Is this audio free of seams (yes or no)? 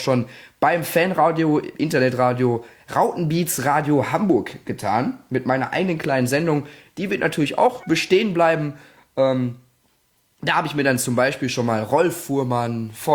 yes